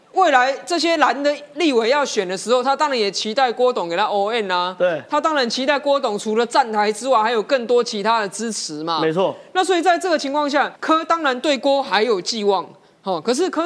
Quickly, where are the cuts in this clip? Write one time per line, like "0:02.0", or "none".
0:10.8

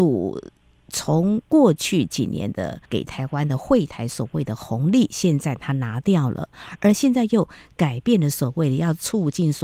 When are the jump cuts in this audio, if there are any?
0:01.4
0:02.9

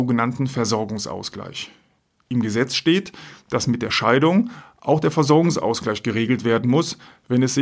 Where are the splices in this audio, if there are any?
none

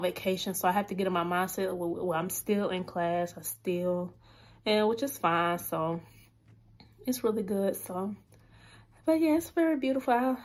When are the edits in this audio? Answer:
none

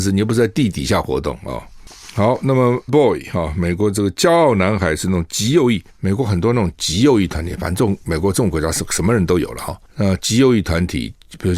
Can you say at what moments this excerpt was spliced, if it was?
0:02.9
0:05.9

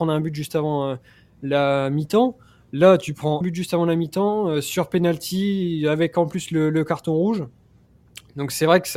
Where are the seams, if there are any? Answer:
0:03.4

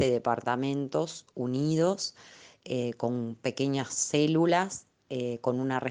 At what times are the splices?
none

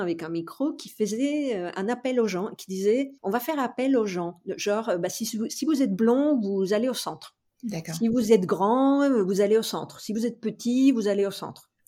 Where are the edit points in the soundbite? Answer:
0:03.2
0:07.5

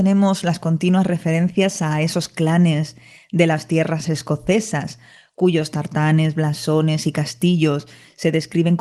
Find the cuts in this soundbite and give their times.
0:04.0

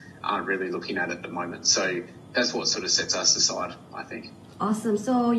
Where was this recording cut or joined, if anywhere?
none

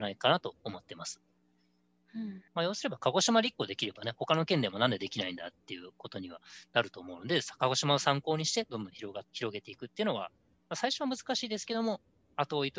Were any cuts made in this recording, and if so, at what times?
0:02.5
0:09.3

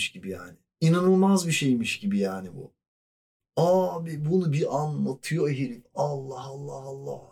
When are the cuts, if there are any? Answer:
none

